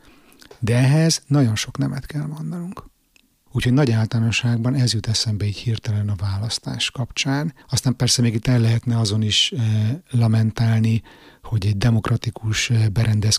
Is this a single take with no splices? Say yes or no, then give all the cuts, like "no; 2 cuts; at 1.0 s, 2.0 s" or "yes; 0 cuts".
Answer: no; 1 cut; at 7.6 s